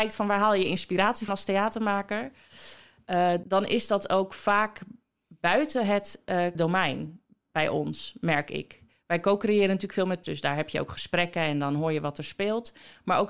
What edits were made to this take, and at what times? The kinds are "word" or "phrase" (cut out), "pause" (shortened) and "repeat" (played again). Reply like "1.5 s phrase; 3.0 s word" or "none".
1.3 s word; 3.4 s word; 6.5 s word; 10.2 s word